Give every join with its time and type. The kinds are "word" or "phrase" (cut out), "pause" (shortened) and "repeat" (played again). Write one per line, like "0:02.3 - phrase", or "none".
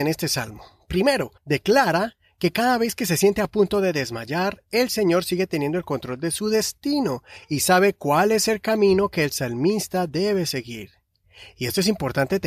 0:01.4 - pause